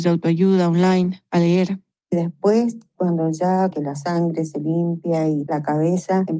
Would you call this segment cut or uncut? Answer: cut